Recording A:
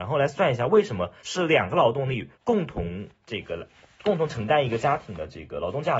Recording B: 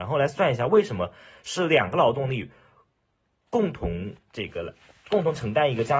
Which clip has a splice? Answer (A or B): A